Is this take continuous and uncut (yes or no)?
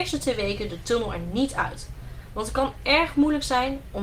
yes